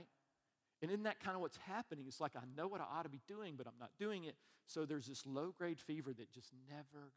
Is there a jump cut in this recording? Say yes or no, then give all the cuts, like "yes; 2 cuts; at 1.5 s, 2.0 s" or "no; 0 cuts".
no; 0 cuts